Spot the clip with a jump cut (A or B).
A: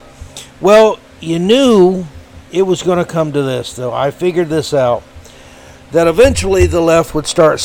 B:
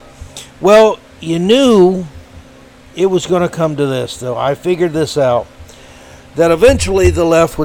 A